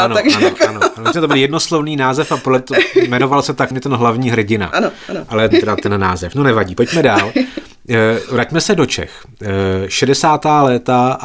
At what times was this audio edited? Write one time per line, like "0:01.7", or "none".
0:03.7
0:05.5